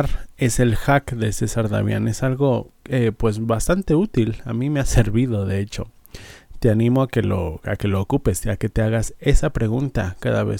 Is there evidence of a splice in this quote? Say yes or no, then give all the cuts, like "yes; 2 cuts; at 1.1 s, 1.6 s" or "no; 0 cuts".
yes; 1 cut; at 2.8 s